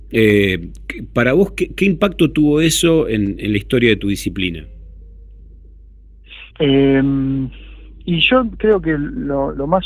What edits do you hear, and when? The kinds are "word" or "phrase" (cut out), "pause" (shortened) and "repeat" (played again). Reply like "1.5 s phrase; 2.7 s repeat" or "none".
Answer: 6.5 s pause